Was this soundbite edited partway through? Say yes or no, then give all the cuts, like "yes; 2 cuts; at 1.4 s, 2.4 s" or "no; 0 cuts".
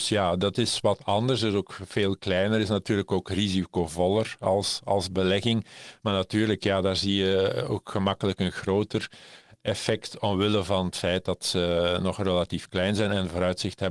no; 0 cuts